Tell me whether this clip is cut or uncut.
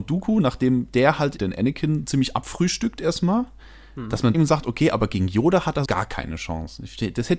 cut